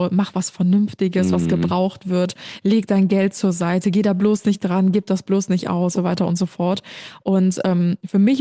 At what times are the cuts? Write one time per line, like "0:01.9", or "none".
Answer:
0:05.9